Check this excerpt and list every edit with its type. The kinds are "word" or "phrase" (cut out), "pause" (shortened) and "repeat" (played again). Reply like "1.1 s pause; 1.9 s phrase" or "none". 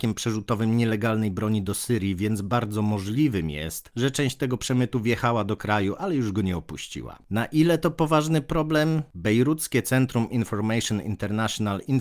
none

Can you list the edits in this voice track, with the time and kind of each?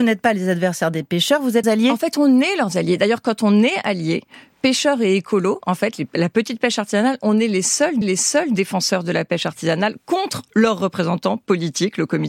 1.6 s word; 8.0 s repeat

